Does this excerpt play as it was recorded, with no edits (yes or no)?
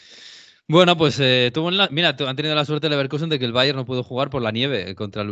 yes